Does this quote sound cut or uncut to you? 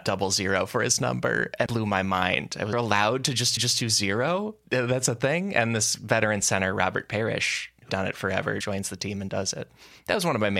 cut